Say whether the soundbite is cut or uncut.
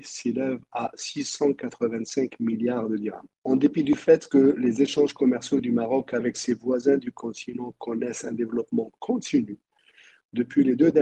cut